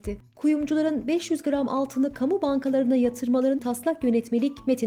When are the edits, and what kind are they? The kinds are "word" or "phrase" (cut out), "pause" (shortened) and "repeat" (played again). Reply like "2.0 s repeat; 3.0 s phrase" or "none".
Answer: 3.6 s word